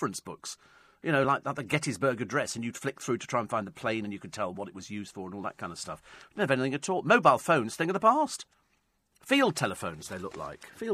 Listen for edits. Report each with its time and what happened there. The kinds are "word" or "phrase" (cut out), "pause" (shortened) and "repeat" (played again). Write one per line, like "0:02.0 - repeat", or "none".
none